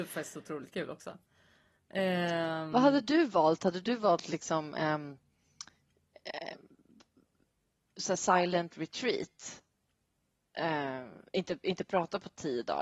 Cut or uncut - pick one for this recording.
uncut